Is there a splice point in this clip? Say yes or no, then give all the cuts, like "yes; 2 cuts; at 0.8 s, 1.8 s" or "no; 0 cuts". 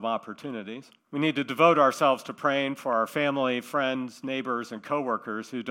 yes; 1 cut; at 1.0 s